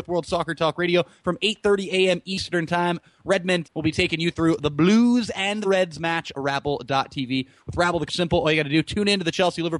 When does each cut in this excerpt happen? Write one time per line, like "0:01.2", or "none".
0:03.6
0:05.6
0:06.3
0:08.1